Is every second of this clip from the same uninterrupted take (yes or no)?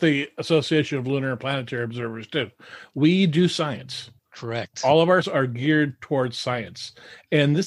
no